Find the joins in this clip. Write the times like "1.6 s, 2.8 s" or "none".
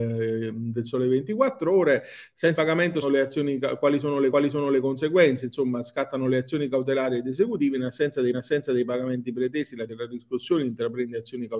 2.6 s, 3.0 s, 4.3 s, 8.3 s, 9.9 s

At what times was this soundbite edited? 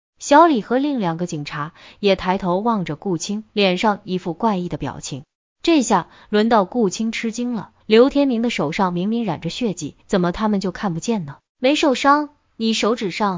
3.5 s, 5.5 s, 7.8 s, 10.0 s, 11.5 s

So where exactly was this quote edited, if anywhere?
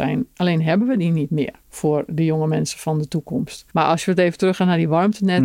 1.6 s, 3.7 s

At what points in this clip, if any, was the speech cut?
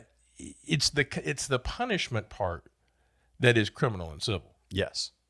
none

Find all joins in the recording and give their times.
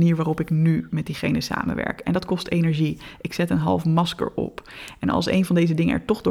none

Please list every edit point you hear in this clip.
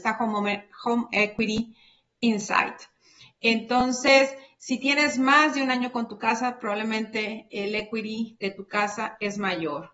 none

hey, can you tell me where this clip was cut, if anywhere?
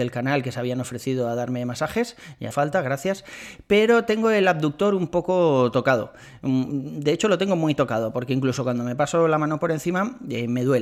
2.5 s

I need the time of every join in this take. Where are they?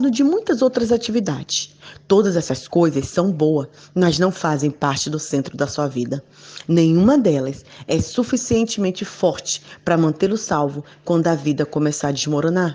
none

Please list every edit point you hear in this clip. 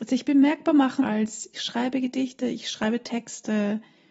1.0 s, 1.5 s

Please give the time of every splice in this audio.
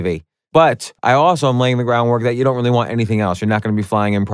1.0 s

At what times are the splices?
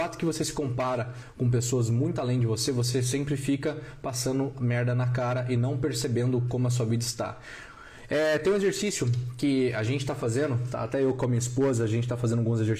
none

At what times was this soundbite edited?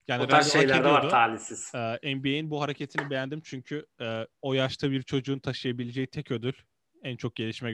4.3 s

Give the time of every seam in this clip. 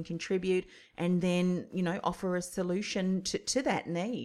none

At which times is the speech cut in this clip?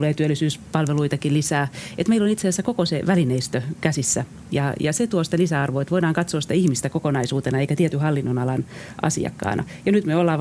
none

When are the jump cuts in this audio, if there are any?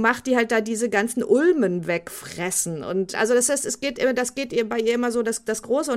3.1 s

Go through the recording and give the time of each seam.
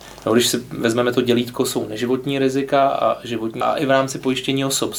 3.6 s

